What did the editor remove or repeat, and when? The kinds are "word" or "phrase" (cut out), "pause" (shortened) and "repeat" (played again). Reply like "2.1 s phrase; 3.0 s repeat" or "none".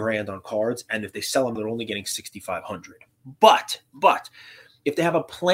1.6 s word